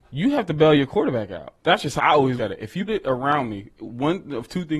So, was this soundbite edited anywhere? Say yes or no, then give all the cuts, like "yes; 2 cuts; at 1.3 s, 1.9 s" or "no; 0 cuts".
yes; 4 cuts; at 1.6 s, 2.0 s, 2.4 s, 2.9 s